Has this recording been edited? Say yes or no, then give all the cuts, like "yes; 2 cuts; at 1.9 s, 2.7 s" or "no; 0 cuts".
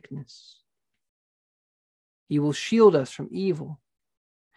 no; 0 cuts